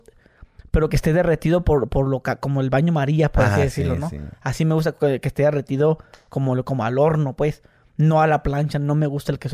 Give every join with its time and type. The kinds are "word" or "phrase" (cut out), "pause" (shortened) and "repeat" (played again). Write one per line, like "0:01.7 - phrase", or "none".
none